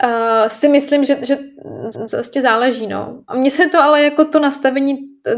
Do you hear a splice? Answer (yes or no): yes